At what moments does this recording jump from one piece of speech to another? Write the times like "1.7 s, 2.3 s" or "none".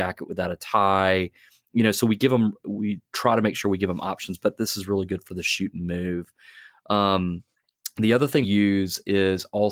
8.4 s

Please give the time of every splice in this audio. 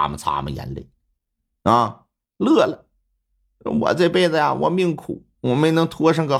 none

